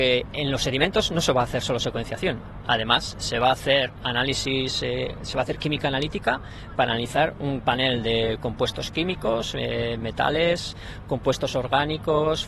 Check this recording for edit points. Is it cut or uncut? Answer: cut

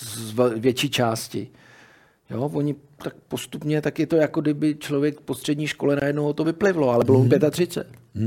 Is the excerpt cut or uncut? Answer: uncut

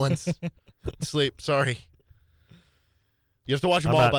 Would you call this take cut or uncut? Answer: cut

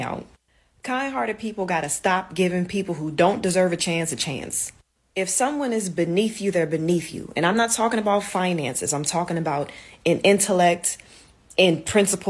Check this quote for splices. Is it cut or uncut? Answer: uncut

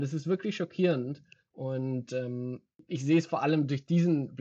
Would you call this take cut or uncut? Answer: uncut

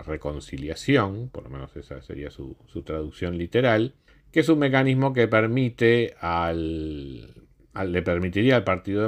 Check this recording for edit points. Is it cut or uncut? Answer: cut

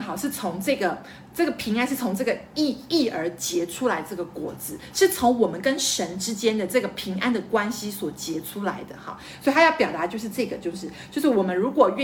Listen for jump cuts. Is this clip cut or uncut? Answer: uncut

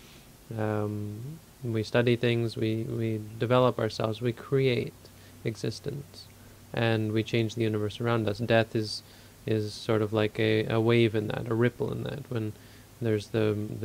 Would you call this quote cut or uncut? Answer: uncut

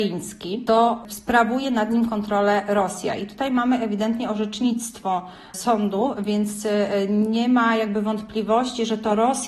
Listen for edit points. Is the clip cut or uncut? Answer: uncut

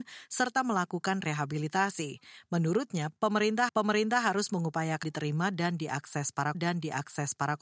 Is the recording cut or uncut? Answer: cut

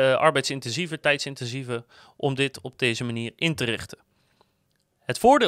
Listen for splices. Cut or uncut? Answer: uncut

